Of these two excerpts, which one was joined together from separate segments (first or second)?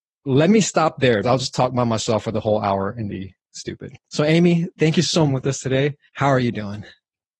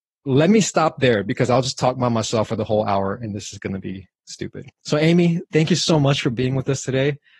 first